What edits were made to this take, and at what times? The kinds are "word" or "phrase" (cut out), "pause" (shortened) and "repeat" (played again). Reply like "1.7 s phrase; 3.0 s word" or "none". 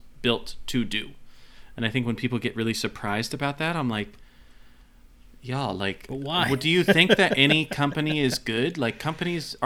none